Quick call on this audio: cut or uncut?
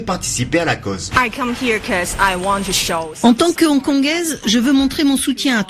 uncut